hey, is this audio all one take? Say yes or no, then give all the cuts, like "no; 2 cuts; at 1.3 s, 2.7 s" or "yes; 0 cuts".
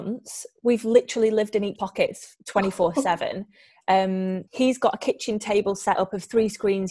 no; 2 cuts; at 1.8 s, 4.5 s